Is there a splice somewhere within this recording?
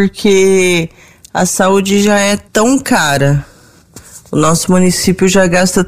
yes; 1 cut; at 2.5 s

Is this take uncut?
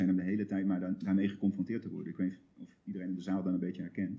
yes; 0 cuts

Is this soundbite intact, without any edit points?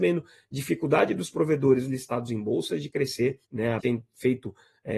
no; 2 cuts; at 3.4 s, 3.8 s

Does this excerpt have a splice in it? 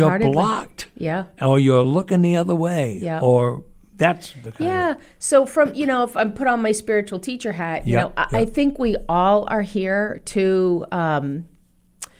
no; 0 cuts

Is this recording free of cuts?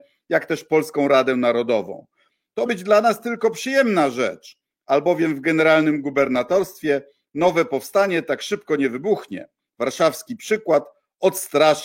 no; 1 cut; at 2.7 s

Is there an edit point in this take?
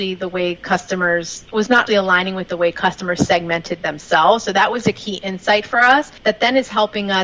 yes; 1 cut; at 1.9 s

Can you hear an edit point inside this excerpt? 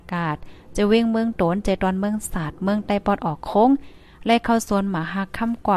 no; 0 cuts

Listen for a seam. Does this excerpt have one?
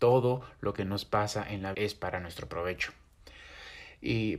yes; 1 cut; at 1.7 s

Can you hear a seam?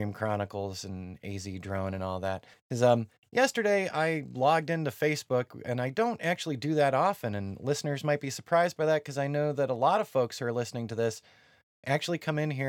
yes; 1 cut; at 2.5 s

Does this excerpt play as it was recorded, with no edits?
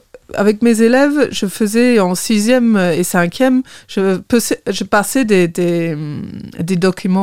yes; 0 cuts

